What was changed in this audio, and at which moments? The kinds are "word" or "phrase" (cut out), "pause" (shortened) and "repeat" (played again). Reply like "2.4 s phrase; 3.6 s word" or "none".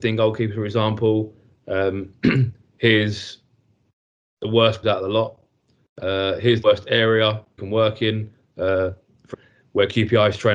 4.8 s word; 6.6 s word; 7.6 s word; 9.3 s word